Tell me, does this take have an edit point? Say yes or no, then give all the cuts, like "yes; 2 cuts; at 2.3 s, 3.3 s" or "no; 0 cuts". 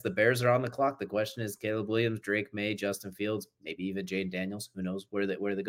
no; 0 cuts